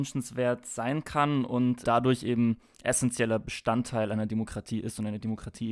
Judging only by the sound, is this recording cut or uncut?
cut